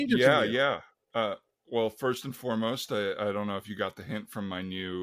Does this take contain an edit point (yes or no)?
no